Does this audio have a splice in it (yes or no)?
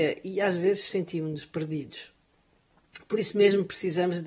no